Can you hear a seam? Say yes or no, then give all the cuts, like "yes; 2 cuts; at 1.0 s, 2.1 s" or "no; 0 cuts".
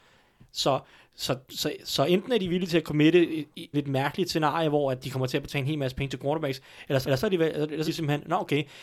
yes; 4 cuts; at 3.7 s, 5.0 s, 7.0 s, 7.9 s